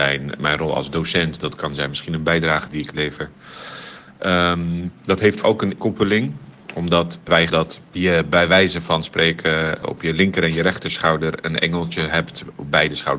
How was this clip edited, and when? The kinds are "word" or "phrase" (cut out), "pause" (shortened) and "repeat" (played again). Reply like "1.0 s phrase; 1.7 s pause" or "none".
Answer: 5.4 s word; 5.8 s word; 7.5 s word